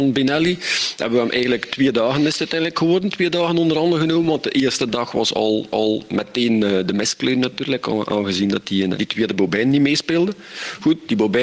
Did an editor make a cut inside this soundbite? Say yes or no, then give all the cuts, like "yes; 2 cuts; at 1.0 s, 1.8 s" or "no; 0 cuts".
yes; 2 cuts; at 5.7 s, 8.9 s